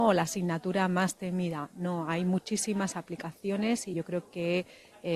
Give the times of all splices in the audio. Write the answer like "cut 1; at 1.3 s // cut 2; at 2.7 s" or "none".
cut 1; at 3.9 s